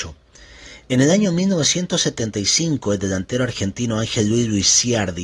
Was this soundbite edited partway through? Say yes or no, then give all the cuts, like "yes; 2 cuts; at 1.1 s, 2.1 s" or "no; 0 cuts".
no; 0 cuts